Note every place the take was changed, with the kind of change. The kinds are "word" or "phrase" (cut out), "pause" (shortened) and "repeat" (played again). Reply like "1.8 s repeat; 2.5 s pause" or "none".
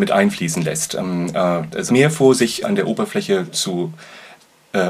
1.9 s phrase; 2.6 s word; 3.5 s word